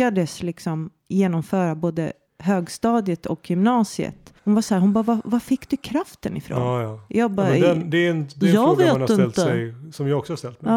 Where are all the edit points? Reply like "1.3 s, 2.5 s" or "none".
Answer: 1.0 s, 2.3 s, 4.4 s